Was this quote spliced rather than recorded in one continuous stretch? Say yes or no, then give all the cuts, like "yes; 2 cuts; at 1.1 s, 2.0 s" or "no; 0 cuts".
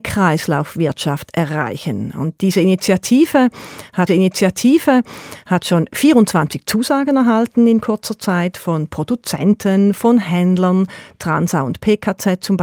yes; 1 cut; at 4.1 s